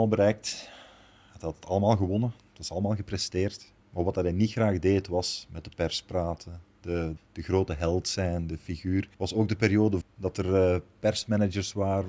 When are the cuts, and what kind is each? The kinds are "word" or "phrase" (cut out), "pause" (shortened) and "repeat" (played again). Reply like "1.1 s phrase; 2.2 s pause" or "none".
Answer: 3.8 s pause; 7.2 s word; 9.1 s pause; 10.0 s word